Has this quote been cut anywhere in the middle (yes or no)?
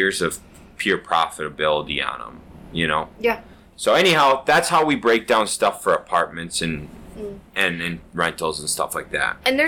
yes